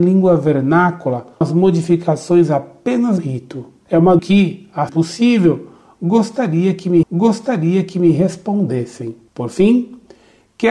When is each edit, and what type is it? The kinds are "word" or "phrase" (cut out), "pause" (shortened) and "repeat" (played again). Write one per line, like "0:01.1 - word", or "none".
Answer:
0:01.4 - word
0:03.2 - word
0:04.2 - phrase
0:04.9 - word
0:07.0 - repeat